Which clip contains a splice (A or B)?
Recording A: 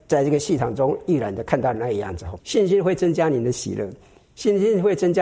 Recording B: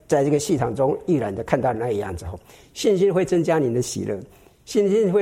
A